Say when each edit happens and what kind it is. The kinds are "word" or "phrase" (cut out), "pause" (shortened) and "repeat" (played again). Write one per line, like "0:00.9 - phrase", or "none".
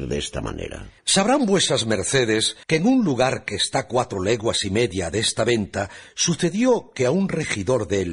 0:01.0 - pause
0:02.6 - pause